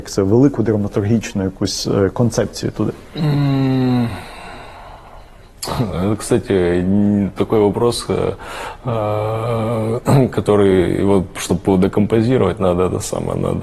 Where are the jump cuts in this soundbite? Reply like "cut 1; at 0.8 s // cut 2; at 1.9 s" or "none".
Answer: none